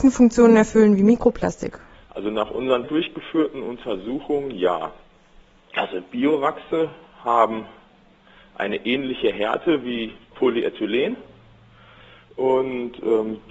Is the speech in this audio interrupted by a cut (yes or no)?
yes